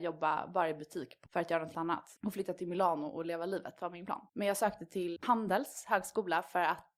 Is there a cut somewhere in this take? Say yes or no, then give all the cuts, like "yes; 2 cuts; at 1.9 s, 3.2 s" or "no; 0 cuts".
yes; 5 cuts; at 1.3 s, 1.7 s, 2.2 s, 4.3 s, 5.2 s